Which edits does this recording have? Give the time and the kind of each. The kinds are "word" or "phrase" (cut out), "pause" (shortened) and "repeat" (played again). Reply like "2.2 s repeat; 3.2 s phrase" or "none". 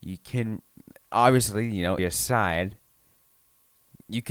2.0 s word